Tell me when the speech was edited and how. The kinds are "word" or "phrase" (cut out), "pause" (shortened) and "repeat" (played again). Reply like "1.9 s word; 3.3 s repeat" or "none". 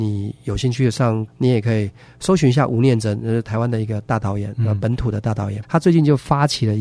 1.3 s word; 5.6 s word